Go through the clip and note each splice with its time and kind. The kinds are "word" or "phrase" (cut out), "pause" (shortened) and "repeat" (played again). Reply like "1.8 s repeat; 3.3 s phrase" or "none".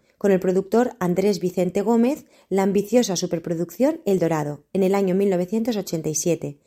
none